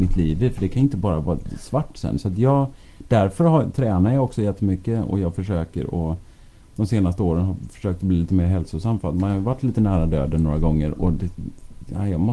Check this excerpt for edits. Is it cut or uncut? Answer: uncut